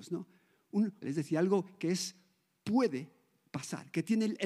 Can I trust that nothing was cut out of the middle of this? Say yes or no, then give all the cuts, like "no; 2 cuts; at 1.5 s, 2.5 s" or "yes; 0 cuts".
no; 1 cut; at 1.0 s